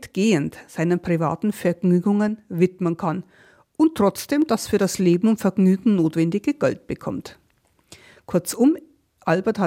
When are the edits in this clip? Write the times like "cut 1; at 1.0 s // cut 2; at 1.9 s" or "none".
none